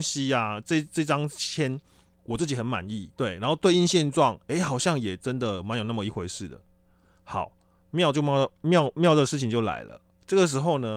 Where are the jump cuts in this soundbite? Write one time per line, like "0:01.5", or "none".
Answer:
0:03.1